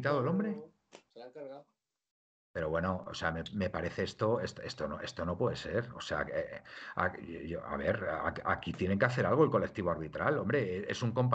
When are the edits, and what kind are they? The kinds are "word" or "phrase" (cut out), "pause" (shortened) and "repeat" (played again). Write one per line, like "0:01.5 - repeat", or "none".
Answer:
none